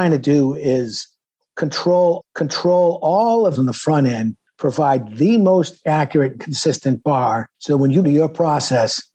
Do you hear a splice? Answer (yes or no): yes